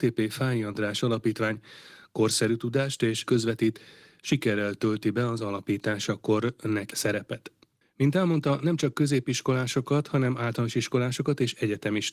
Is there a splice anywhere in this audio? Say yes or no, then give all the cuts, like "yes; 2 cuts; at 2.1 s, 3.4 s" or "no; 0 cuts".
yes; 2 cuts; at 3.2 s, 6.9 s